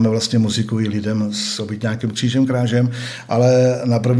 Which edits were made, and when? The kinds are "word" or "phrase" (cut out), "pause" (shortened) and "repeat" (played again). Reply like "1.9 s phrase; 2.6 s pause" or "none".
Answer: none